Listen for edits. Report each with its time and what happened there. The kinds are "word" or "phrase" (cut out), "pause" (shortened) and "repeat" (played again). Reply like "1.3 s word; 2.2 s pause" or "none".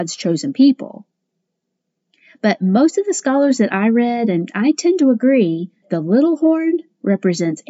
5.8 s word